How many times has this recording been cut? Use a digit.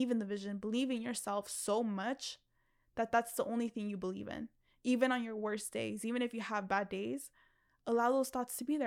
0